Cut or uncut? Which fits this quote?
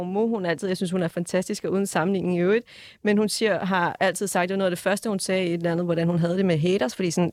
uncut